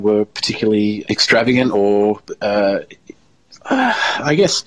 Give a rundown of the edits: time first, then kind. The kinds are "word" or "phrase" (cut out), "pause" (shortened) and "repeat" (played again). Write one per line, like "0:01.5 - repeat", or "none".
0:01.0 - word